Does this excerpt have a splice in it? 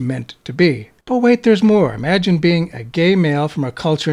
yes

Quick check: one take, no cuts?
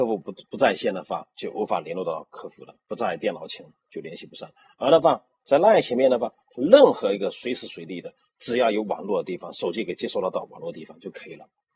yes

